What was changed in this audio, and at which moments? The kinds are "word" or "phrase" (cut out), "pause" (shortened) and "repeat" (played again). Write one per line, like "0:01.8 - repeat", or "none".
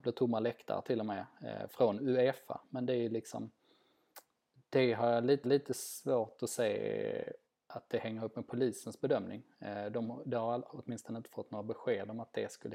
0:05.4 - repeat
0:07.4 - pause
0:10.7 - word